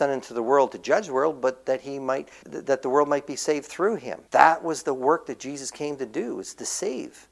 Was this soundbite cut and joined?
yes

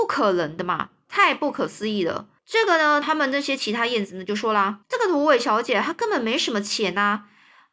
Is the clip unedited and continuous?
no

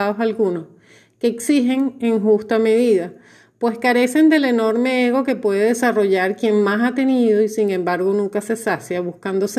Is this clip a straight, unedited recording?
yes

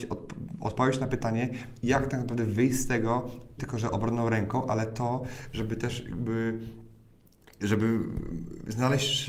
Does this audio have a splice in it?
yes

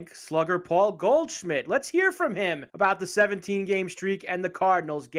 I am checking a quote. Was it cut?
yes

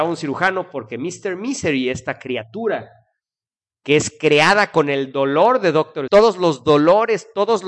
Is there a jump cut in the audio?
yes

